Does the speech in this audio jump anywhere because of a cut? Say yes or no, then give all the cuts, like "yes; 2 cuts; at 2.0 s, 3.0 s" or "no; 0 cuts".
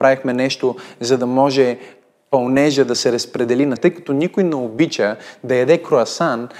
yes; 1 cut; at 3.8 s